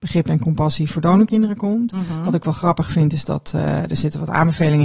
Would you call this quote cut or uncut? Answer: uncut